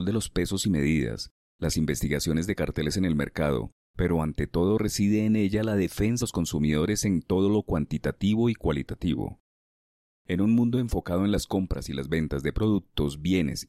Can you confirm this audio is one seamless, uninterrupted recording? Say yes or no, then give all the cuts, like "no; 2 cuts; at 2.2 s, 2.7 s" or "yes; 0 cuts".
no; 1 cut; at 6.2 s